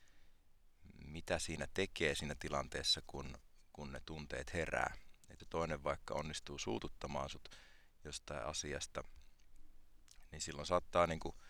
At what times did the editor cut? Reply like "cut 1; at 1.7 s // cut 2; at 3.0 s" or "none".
cut 1; at 5.4 s